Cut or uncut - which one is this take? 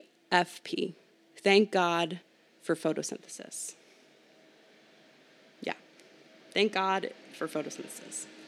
uncut